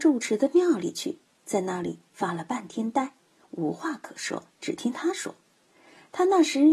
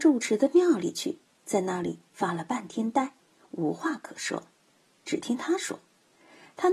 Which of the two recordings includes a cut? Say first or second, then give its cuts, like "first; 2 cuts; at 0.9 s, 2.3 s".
first; 1 cut; at 4.5 s